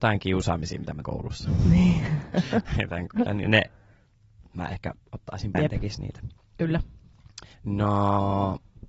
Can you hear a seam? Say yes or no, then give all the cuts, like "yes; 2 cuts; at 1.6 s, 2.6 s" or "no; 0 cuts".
yes; 4 cuts; at 1.0 s, 3.3 s, 5.5 s, 7.5 s